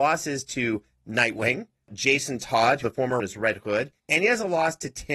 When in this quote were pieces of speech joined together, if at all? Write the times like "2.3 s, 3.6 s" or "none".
2.8 s, 3.2 s, 4.0 s